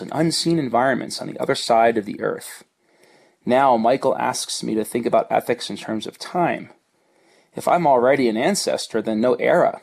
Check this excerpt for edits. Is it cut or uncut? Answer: uncut